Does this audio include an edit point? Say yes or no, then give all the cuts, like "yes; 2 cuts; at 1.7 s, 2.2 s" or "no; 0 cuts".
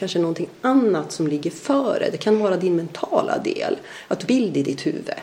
yes; 1 cut; at 4.3 s